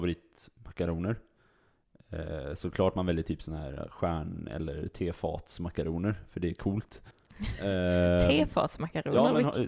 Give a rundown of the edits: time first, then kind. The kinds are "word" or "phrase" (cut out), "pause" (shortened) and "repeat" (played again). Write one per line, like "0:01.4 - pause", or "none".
0:07.1 - pause